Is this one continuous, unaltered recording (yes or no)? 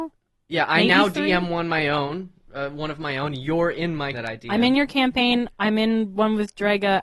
no